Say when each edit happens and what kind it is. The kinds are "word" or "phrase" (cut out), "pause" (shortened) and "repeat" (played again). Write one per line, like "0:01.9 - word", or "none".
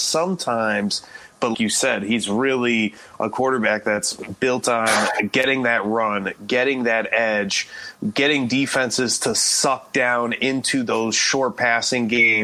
0:01.5 - word